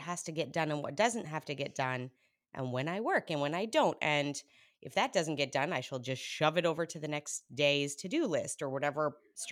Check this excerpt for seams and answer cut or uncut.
uncut